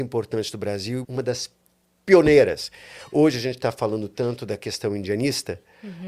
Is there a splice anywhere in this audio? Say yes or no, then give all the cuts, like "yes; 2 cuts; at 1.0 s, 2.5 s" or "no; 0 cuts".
yes; 1 cut; at 1.0 s